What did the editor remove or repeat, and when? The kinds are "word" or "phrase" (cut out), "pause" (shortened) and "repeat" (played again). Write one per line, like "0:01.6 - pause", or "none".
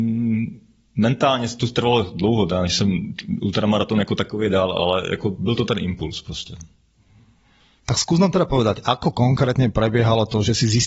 none